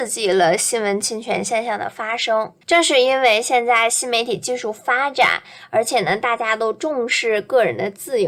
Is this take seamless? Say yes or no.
no